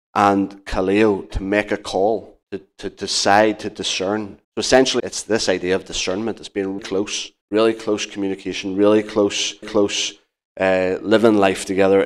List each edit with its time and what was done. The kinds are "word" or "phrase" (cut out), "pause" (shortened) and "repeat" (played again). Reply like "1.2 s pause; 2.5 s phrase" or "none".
2.4 s pause; 4.4 s pause; 5.0 s word; 6.8 s word; 7.4 s pause; 9.6 s repeat